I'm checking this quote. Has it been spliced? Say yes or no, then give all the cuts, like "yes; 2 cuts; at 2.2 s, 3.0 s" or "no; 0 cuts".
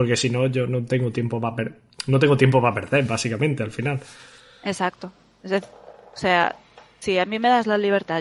no; 0 cuts